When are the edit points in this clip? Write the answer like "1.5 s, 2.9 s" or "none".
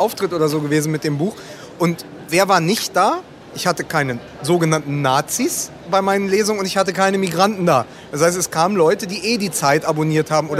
3.4 s